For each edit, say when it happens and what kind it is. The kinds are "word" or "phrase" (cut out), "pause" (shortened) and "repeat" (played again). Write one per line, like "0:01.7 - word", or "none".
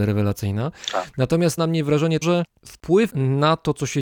0:01.6 - word
0:02.2 - word
0:03.1 - word